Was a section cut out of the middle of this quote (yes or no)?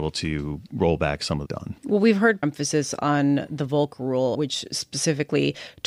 yes